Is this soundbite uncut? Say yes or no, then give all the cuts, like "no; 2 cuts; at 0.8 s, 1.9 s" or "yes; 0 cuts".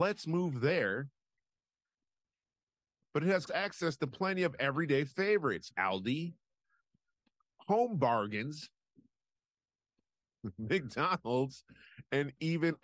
no; 2 cuts; at 3.5 s, 5.7 s